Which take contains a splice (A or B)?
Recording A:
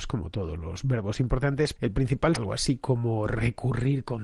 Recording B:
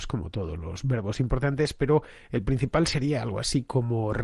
A